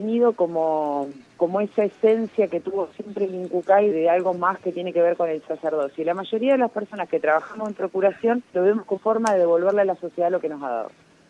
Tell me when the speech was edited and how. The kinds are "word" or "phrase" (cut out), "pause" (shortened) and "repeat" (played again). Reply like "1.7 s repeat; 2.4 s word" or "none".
1.3 s pause; 3.9 s word; 8.5 s pause; 9.0 s word